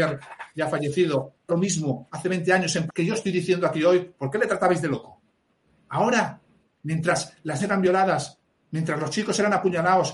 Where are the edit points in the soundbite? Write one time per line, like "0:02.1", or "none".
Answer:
0:01.5
0:02.9
0:07.6